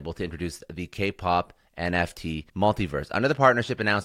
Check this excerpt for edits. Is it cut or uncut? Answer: cut